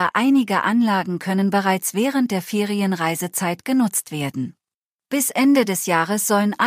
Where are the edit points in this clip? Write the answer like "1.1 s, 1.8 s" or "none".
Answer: 4.9 s